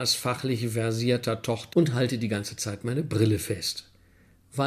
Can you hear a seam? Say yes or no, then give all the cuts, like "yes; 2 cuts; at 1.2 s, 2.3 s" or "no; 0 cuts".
yes; 1 cut; at 1.7 s